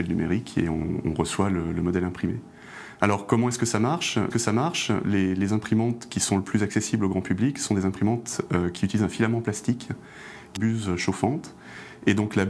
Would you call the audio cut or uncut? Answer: cut